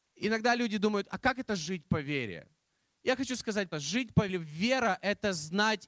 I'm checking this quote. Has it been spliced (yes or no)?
yes